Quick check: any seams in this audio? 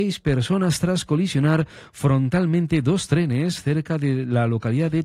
no; 0 cuts

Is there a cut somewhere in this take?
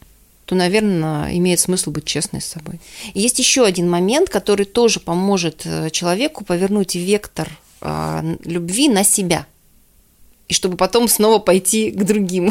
no; 0 cuts

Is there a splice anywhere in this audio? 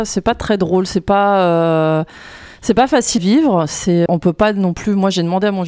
yes; 2 cuts; at 3.2 s, 4.1 s

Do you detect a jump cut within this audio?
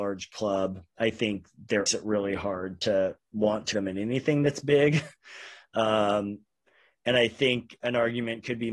yes; 2 cuts; at 1.9 s, 3.7 s

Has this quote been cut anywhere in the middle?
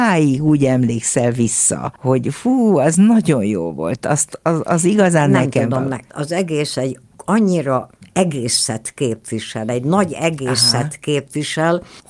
no; 0 cuts

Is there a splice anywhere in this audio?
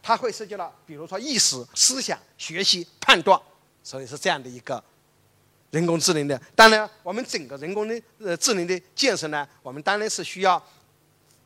yes; 3 cuts; at 1.7 s, 3.7 s, 5.3 s

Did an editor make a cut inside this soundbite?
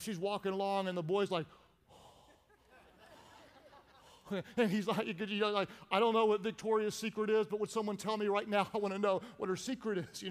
no; 0 cuts

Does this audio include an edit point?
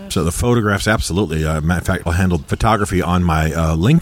yes; 2 cuts; at 2.1 s, 2.4 s

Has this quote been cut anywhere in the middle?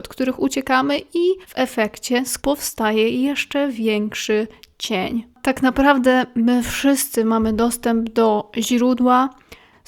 yes; 3 cuts; at 1.4 s, 2.4 s, 5.3 s

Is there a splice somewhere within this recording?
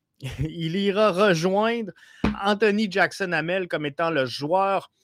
no; 0 cuts

